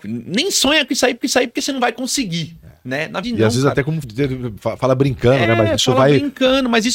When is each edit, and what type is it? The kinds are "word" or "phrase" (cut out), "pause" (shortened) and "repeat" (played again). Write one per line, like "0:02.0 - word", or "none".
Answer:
0:01.2 - repeat
0:03.2 - word
0:04.0 - word